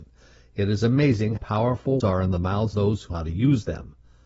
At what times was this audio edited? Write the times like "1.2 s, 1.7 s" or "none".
1.4 s, 2.0 s, 2.7 s, 3.1 s